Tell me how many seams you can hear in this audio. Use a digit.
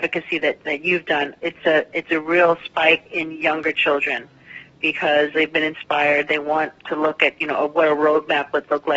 1